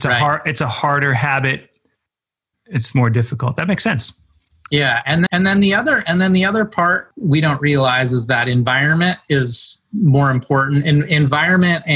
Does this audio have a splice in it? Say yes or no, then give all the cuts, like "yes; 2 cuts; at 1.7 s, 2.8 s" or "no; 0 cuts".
yes; 1 cut; at 5.3 s